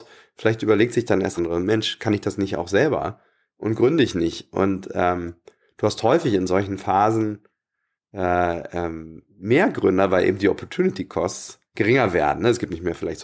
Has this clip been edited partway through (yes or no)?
yes